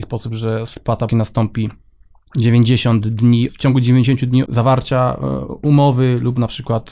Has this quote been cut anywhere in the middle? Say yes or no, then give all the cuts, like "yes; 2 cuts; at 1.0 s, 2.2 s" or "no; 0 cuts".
yes; 3 cuts; at 1.1 s, 3.5 s, 4.5 s